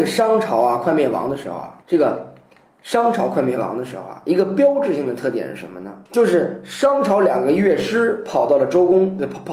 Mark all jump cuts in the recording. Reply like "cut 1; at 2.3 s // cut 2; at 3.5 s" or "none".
cut 1; at 1.8 s // cut 2; at 6.1 s